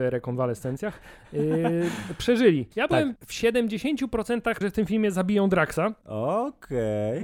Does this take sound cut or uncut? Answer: cut